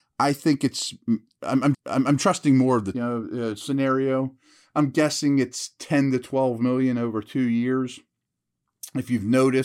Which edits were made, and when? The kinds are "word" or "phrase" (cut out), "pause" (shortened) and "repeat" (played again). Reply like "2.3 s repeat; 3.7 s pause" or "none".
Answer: 1.7 s repeat; 2.9 s phrase